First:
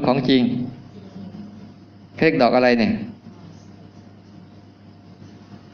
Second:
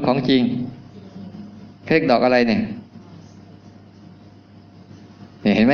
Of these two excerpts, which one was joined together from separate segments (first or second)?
second